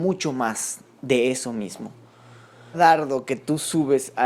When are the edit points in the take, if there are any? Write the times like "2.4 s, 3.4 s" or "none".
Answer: 2.7 s